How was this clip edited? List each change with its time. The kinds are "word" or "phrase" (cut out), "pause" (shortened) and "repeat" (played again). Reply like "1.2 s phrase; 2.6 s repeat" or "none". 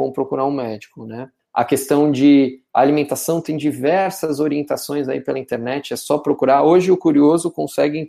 none